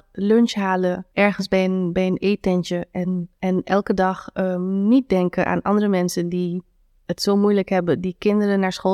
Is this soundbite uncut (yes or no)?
yes